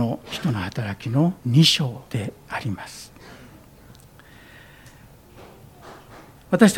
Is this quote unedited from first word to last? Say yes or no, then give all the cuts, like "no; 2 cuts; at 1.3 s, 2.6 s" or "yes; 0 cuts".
no; 2 cuts; at 1.4 s, 2.1 s